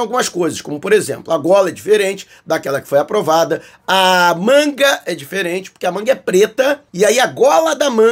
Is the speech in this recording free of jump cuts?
no; 1 cut; at 6.9 s

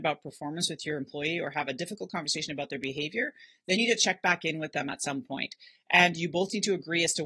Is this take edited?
yes; 1 cut; at 3.8 s

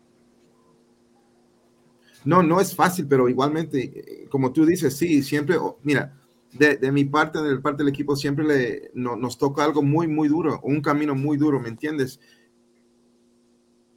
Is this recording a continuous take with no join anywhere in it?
no; 1 cut; at 5.8 s

